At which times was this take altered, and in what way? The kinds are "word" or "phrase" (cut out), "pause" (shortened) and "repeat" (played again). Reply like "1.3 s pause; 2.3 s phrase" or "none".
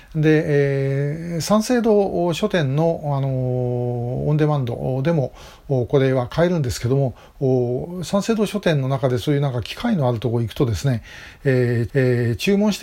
11.9 s repeat